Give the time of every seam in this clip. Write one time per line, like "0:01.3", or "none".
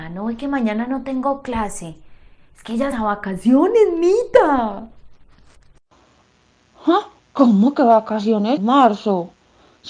0:02.9
0:07.2
0:08.6

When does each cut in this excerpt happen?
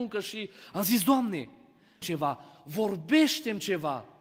0:02.0

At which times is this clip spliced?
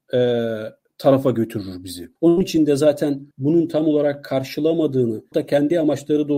0:02.2
0:03.3
0:05.3

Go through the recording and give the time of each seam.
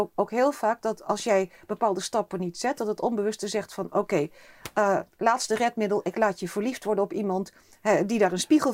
none

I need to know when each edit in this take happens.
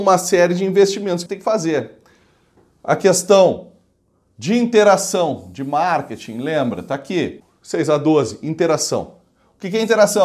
0:01.3

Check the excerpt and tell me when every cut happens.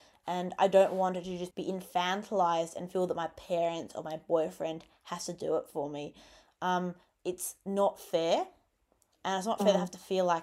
0:01.5

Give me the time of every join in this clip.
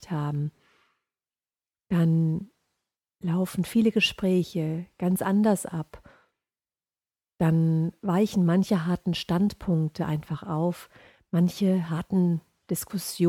0:03.0

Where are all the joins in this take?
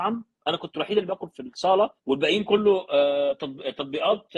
0:01.3
0:02.0

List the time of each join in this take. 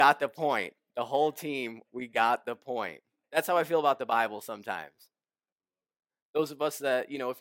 none

